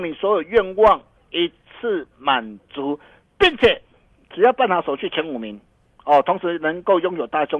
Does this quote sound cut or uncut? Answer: uncut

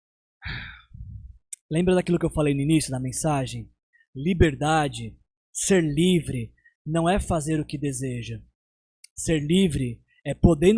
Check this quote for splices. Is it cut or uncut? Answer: uncut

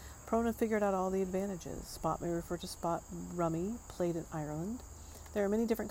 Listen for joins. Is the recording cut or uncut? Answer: uncut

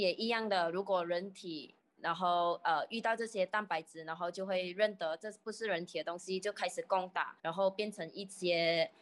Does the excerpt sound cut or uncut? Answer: cut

